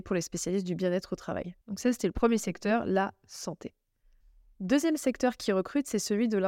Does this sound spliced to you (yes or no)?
yes